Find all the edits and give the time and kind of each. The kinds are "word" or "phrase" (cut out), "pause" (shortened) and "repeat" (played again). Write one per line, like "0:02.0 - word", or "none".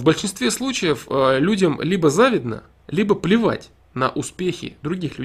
none